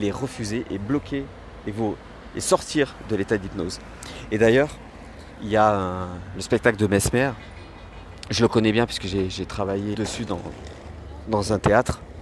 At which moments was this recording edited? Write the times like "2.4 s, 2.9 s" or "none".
9.9 s